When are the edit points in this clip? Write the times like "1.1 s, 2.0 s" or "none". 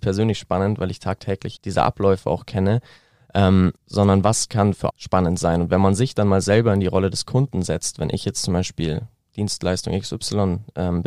1.6 s, 3.8 s, 4.9 s